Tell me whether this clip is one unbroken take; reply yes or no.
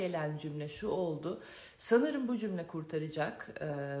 yes